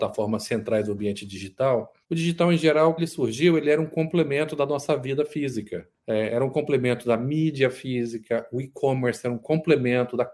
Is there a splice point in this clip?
yes; 3 cuts; at 2.0 s, 3.0 s, 6.0 s

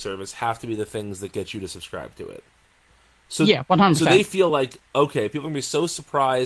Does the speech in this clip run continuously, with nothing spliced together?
yes; 0 cuts

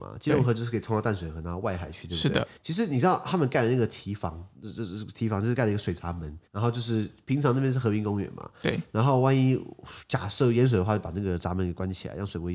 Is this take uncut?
no; 2 cuts; at 2.6 s, 6.5 s

